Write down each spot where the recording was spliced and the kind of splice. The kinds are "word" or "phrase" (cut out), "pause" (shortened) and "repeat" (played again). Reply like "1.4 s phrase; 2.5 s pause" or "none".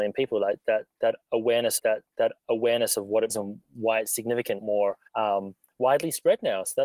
1.8 s repeat; 3.3 s word; 4.6 s phrase; 5.1 s pause